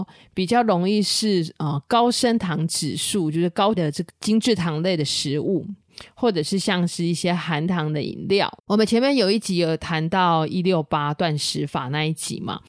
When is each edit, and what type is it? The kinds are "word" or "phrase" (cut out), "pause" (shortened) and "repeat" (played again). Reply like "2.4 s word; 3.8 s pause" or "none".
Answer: 3.8 s word; 8.6 s pause